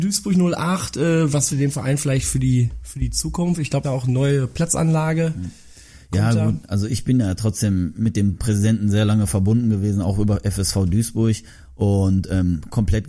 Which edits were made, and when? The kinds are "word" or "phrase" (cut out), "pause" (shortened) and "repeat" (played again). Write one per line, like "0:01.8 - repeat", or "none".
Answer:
0:01.5 - word
0:03.8 - word

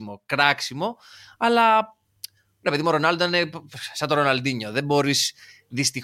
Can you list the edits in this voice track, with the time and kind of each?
none

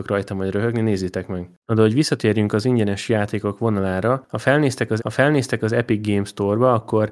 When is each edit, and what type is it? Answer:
0:01.5 - pause
0:05.0 - repeat

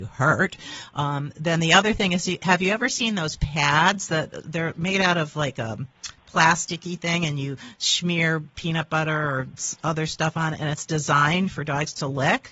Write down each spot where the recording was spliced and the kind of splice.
none

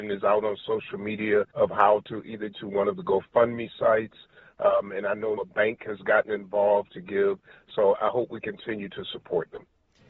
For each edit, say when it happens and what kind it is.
0:01.5 - pause
0:02.5 - word
0:05.4 - word

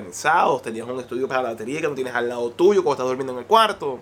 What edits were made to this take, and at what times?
none

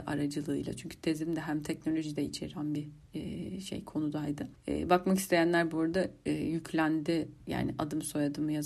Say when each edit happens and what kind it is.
none

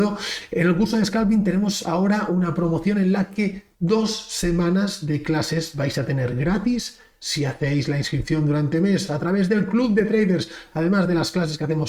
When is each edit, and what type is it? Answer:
0:03.7 - pause

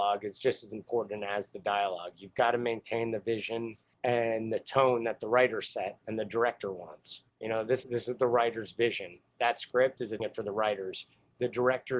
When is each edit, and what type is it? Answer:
0:03.9 - pause
0:07.3 - pause
0:07.8 - word
0:09.3 - pause
0:10.2 - phrase

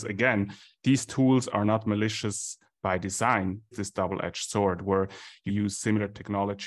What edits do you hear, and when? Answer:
0:03.7 - phrase
0:05.5 - word

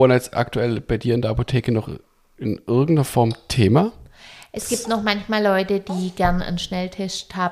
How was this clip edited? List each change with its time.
none

